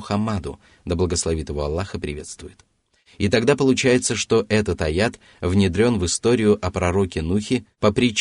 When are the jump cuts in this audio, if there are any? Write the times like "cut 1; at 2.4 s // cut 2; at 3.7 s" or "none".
none